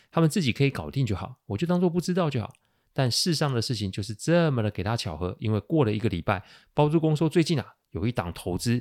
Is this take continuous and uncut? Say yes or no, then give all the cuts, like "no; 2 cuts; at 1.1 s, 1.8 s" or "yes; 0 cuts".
yes; 0 cuts